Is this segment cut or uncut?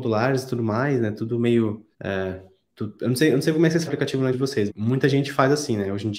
cut